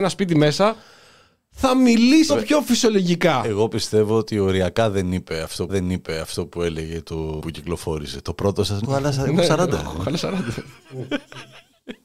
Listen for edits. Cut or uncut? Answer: cut